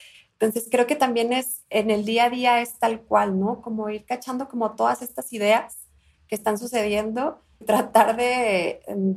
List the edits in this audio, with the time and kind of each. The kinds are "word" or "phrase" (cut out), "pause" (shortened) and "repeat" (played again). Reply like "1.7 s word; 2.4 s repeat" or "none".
7.6 s word